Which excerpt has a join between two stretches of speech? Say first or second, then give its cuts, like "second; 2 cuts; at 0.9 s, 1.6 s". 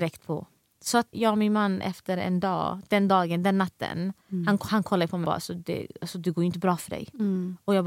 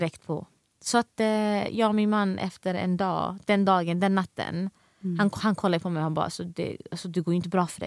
first; 3 cuts; at 1.1 s, 4.2 s, 5.2 s